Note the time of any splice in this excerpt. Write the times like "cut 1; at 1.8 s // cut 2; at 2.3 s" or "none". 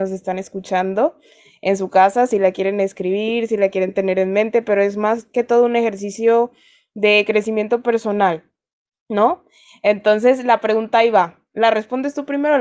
none